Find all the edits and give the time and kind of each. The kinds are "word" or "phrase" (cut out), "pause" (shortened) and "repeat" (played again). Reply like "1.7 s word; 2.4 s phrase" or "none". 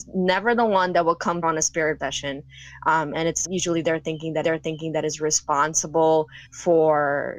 1.4 s word; 2.0 s word; 3.4 s phrase; 4.4 s repeat; 6.5 s pause